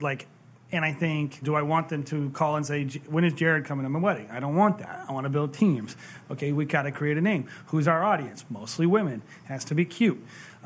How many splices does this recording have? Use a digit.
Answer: 1